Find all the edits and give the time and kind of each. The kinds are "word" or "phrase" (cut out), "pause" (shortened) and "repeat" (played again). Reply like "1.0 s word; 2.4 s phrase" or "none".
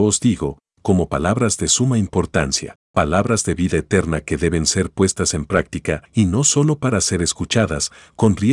2.8 s pause; 6.1 s pause